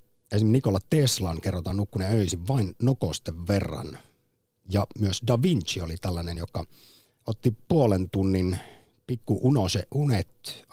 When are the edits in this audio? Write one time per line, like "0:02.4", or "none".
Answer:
none